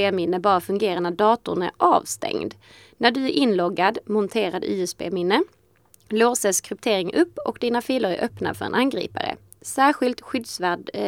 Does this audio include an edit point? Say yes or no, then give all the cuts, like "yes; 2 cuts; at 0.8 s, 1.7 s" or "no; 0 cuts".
no; 0 cuts